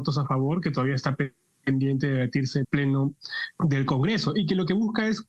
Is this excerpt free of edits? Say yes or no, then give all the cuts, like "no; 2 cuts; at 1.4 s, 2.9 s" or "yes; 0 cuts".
no; 2 cuts; at 2.6 s, 3.6 s